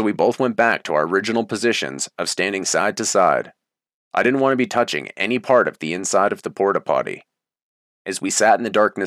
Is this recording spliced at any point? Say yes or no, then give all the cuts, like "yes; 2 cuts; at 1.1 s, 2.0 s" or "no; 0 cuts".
no; 0 cuts